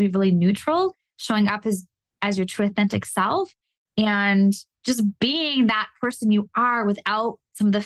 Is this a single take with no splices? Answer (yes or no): yes